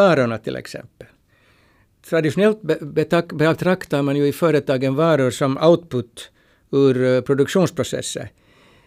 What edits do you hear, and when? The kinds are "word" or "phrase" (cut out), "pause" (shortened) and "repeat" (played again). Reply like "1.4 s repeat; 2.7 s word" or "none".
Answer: none